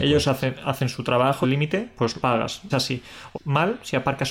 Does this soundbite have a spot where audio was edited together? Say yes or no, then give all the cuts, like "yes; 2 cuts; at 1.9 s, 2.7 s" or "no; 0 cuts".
yes; 4 cuts; at 1.4 s, 2.2 s, 2.7 s, 3.3 s